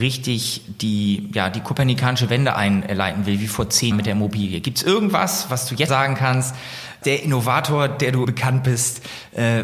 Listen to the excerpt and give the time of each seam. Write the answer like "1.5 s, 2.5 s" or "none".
3.9 s, 5.9 s, 7.0 s, 8.2 s